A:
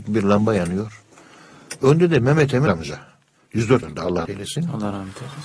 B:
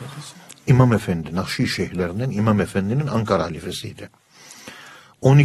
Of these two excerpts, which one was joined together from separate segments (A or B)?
A